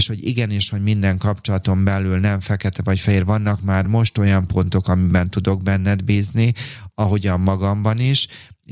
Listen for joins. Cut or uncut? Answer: uncut